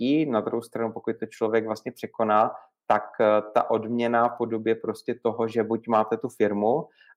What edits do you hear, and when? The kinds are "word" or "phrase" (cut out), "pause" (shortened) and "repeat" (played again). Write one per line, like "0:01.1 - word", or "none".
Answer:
none